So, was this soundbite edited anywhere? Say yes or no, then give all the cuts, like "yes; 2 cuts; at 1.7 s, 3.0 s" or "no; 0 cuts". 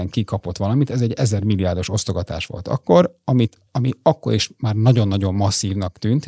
yes; 1 cut; at 3.7 s